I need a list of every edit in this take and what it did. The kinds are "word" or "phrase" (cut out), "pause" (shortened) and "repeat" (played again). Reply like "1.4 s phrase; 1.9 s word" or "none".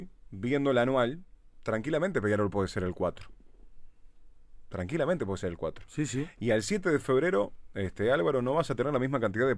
none

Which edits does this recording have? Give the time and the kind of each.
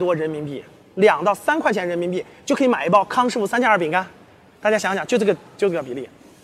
none

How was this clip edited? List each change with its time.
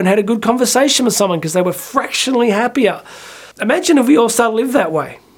3.5 s pause

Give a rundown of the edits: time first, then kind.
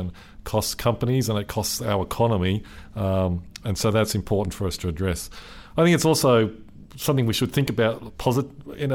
none

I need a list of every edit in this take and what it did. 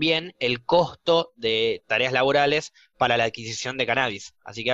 none

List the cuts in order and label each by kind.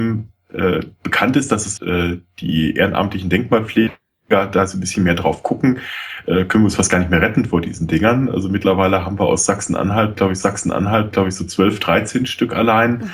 1.8 s phrase; 10.4 s repeat

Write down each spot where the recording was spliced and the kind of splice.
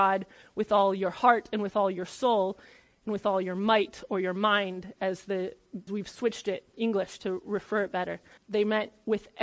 5.9 s word; 6.7 s word; 8.4 s word

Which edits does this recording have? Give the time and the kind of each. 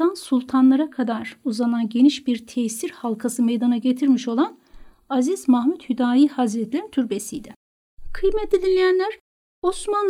none

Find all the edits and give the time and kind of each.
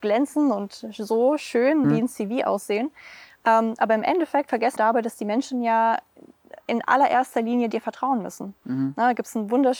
1.8 s word; 4.8 s word

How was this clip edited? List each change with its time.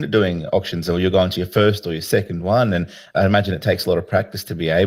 none

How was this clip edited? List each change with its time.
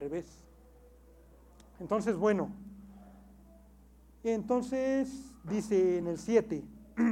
none

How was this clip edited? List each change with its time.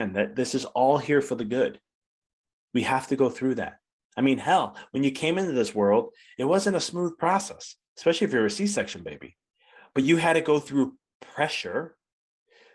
none

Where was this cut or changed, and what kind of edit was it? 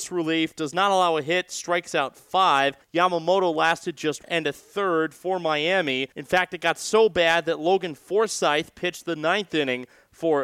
2.8 s pause; 4.2 s word; 6.1 s pause

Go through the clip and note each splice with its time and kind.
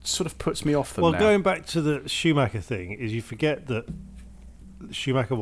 none

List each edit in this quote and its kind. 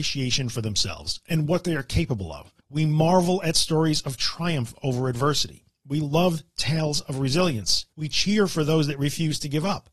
2.6 s pause; 7.9 s pause

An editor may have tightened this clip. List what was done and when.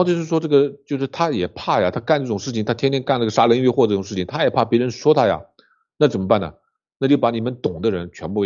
none

